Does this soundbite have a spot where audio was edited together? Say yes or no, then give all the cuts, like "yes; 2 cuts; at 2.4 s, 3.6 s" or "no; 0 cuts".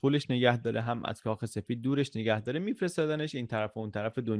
no; 0 cuts